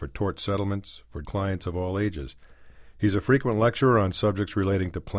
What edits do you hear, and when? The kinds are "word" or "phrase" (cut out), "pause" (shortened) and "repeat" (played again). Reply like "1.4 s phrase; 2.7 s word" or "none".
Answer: 1.2 s word